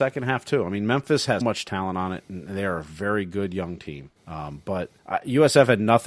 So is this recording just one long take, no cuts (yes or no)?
no